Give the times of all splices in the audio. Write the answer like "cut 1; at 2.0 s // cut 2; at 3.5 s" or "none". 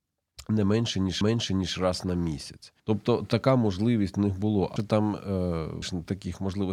cut 1; at 1.2 s // cut 2; at 2.8 s // cut 3; at 4.8 s // cut 4; at 5.8 s